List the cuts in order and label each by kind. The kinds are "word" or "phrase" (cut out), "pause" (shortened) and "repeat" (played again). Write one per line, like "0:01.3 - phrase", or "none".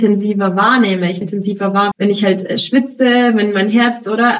0:01.2 - word
0:01.9 - word